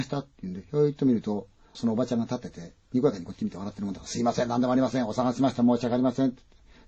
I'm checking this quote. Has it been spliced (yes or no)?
yes